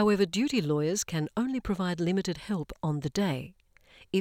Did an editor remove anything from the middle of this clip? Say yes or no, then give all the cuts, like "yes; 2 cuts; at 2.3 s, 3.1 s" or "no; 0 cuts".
no; 0 cuts